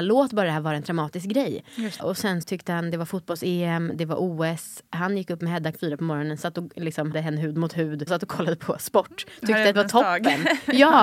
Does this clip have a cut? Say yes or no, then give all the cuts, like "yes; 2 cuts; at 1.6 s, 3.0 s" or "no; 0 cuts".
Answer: yes; 6 cuts; at 2.0 s, 2.4 s, 5.7 s, 7.1 s, 8.1 s, 9.7 s